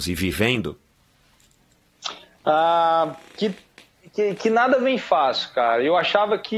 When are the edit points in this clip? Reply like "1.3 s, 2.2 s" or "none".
none